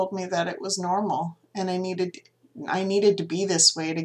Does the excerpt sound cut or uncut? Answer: uncut